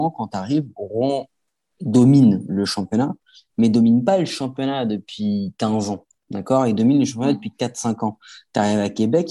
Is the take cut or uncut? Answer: uncut